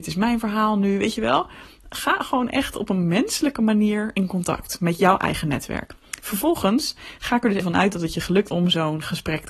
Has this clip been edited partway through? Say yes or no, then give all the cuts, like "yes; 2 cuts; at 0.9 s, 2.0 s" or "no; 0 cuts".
yes; 2 cuts; at 7.6 s, 8.5 s